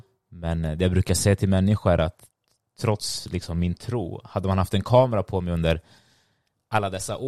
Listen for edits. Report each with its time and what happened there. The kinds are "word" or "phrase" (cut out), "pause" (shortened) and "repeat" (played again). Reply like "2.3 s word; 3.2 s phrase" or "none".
none